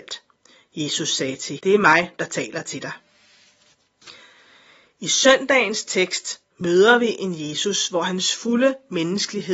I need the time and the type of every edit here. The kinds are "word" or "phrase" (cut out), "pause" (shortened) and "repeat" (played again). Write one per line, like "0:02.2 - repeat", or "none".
0:01.6 - word

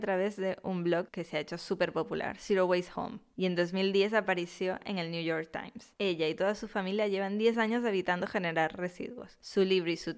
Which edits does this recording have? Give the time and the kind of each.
none

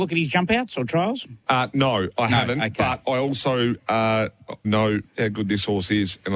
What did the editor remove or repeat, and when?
0:04.6 - word
0:05.1 - pause

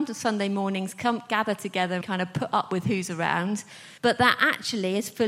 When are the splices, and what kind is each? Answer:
0:02.0 - word
0:04.0 - pause

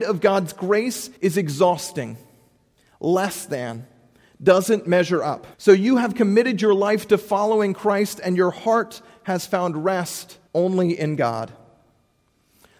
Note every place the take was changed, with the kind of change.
0:01.2 - pause
0:05.5 - pause
0:10.5 - pause

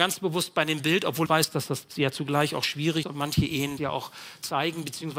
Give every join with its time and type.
0:01.3 - word
0:03.0 - word
0:03.8 - word

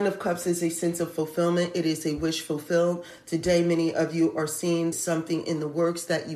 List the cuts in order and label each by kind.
0:04.9 - phrase

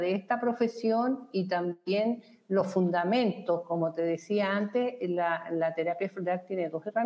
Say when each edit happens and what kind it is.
none

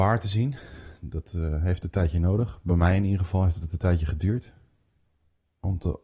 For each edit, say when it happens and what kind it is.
none

